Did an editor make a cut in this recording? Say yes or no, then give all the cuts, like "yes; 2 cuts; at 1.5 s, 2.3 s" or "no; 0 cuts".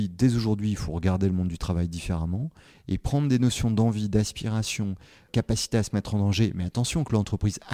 no; 0 cuts